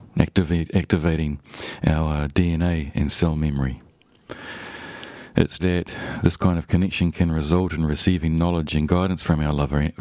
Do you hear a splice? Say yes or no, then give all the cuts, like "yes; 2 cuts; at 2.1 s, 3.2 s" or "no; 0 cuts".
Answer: yes; 1 cut; at 5.6 s